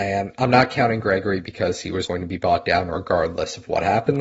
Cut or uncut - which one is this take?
cut